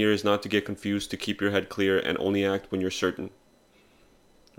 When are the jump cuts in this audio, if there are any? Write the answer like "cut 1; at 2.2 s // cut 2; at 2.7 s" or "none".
none